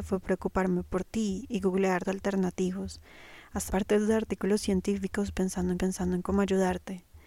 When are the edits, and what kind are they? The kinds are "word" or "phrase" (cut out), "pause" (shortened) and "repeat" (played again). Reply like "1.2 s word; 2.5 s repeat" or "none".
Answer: 2.0 s word; 3.7 s word; 5.8 s repeat